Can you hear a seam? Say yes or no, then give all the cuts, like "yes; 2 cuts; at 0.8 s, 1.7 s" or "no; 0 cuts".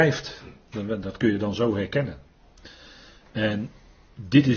no; 0 cuts